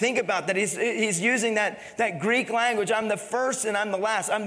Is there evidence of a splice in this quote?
no; 0 cuts

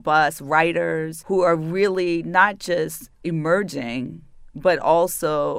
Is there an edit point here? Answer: yes; 1 cut; at 3.1 s

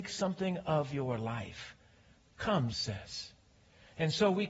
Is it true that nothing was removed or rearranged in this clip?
no; 1 cut; at 2.7 s

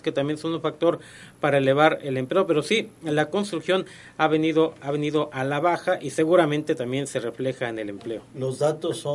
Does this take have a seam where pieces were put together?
no; 0 cuts

